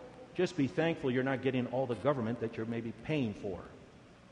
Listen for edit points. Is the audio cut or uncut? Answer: uncut